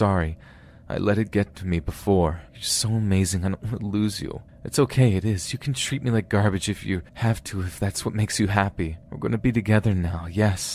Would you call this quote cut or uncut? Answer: cut